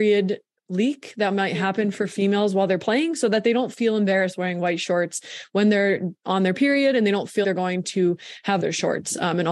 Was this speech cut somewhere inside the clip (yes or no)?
yes